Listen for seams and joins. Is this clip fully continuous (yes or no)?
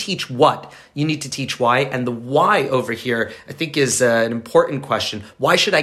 yes